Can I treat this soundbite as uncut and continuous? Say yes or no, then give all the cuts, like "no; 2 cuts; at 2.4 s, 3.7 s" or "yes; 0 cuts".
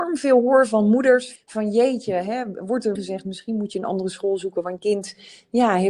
no; 3 cuts; at 1.4 s, 3.0 s, 4.8 s